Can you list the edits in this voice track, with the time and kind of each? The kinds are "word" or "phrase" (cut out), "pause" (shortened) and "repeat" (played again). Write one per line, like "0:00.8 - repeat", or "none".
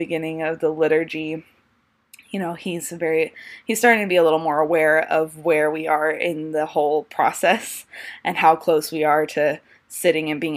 none

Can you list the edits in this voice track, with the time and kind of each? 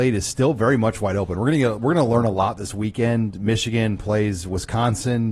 none

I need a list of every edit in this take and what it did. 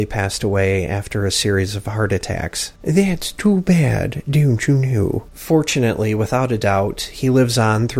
none

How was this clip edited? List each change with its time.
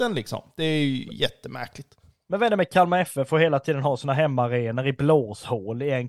none

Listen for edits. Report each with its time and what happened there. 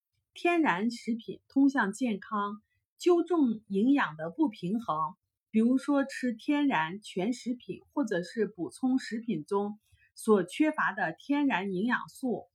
none

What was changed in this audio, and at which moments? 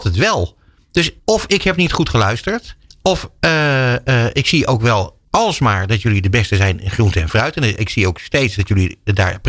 0:01.2 - pause
0:02.9 - pause
0:05.2 - pause

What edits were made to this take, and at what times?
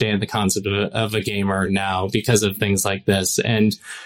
none

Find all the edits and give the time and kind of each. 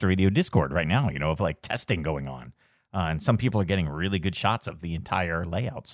none

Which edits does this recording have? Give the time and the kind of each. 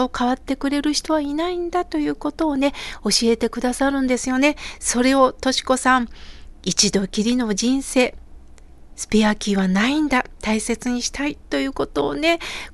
0:10.4 - pause

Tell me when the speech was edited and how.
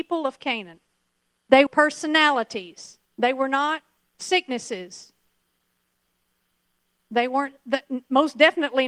0:01.7 - word
0:03.1 - pause

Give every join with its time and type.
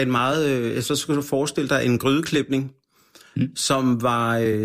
none

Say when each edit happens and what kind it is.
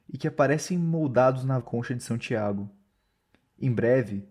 0:01.6 - phrase

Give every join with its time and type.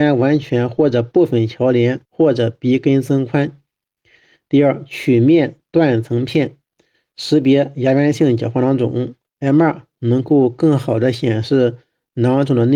0:02.0 - pause

